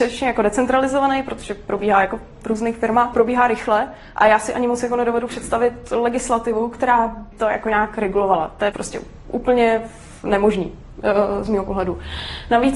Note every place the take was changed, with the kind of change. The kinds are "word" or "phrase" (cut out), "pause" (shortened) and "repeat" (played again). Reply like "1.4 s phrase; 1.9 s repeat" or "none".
3.1 s word; 7.3 s word; 8.7 s word